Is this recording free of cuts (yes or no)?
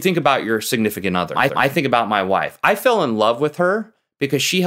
no